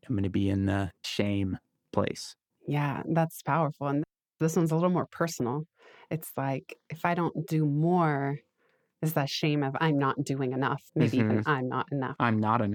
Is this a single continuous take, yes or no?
no